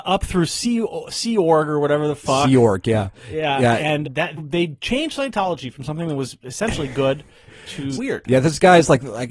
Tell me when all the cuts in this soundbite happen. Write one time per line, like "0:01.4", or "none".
0:04.0
0:04.4
0:07.9